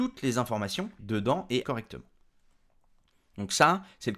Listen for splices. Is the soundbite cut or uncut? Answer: cut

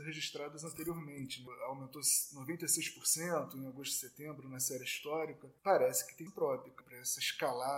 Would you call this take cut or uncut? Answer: cut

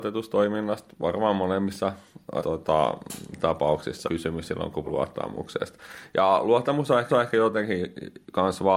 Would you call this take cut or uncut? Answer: cut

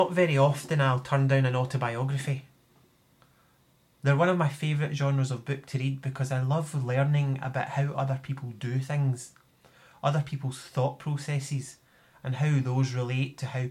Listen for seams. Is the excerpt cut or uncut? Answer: uncut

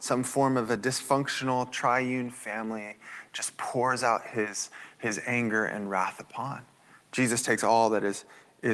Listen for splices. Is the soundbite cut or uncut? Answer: uncut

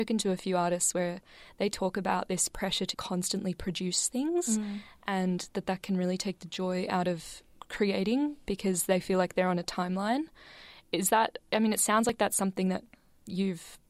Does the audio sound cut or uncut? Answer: cut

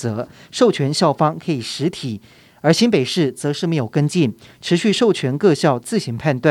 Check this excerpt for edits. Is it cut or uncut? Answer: uncut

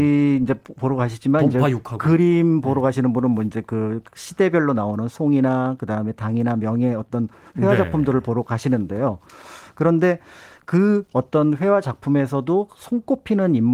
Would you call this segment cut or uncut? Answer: uncut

